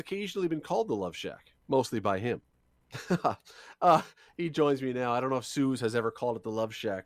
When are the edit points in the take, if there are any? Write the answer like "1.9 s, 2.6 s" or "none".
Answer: 1.6 s